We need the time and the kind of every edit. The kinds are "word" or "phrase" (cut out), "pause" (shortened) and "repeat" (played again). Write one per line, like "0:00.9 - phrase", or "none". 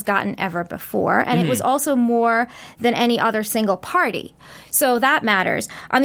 none